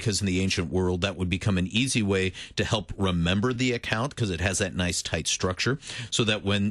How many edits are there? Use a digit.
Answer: 0